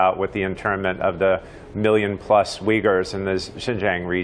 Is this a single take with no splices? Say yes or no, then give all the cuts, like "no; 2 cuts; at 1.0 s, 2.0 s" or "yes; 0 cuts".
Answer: yes; 0 cuts